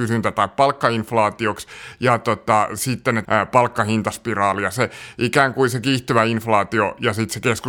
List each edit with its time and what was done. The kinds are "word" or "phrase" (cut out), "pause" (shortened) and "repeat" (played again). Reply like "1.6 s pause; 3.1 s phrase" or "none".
3.2 s phrase